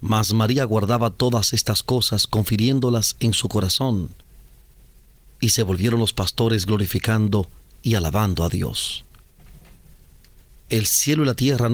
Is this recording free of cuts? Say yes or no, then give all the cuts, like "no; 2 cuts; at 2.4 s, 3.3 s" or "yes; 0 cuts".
yes; 0 cuts